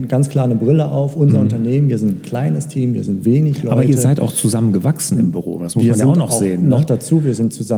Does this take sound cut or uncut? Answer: uncut